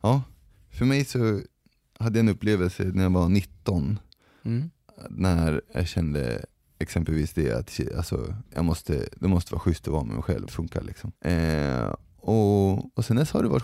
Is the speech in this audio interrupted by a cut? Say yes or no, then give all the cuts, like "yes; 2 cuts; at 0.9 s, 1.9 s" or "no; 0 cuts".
yes; 4 cuts; at 6.5 s, 8.5 s, 10.5 s, 11.2 s